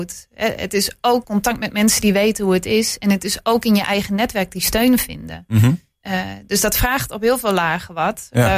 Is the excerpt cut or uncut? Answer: cut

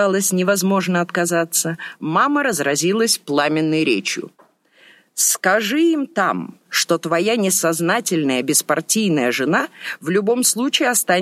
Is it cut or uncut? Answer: uncut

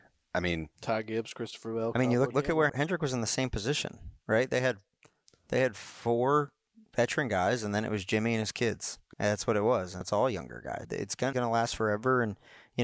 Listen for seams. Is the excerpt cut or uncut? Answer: cut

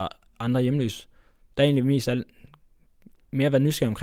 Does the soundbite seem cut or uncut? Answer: uncut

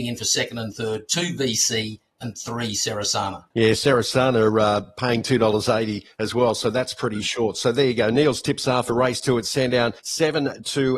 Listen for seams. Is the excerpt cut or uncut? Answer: cut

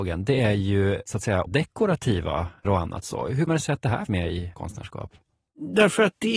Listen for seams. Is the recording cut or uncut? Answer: cut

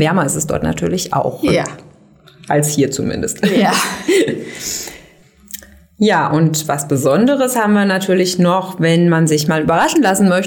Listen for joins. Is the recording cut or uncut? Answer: uncut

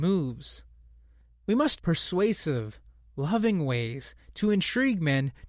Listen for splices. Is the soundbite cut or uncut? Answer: cut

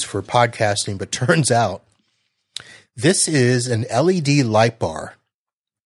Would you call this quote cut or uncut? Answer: uncut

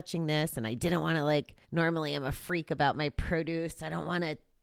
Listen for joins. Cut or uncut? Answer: cut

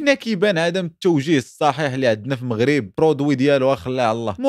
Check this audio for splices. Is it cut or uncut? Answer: cut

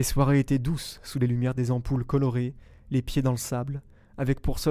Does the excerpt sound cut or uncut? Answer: uncut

